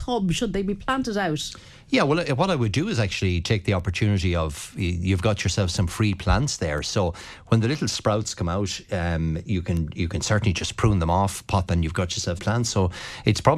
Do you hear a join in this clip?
yes; 2 cuts; at 11.7 s, 12.4 s

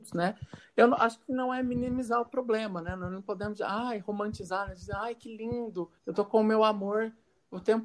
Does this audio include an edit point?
yes; 1 cut; at 6.0 s

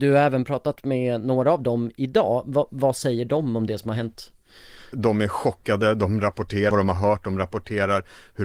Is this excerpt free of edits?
no; 2 cuts; at 4.9 s, 6.7 s

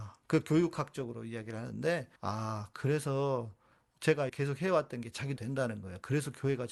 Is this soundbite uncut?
no; 3 cuts; at 2.2 s, 4.3 s, 5.4 s

